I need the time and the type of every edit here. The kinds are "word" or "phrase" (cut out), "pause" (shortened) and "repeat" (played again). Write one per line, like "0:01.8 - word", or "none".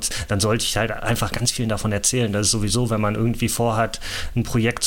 none